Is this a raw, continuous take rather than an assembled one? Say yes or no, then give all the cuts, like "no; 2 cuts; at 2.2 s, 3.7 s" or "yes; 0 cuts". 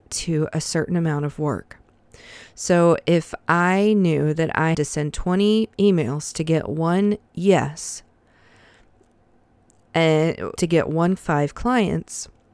no; 5 cuts; at 4.7 s, 5.7 s, 7.3 s, 10.6 s, 11.2 s